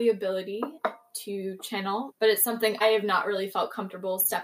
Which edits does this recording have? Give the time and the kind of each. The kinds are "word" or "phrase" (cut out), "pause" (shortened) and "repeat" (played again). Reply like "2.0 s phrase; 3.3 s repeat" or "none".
2.1 s word; 2.8 s word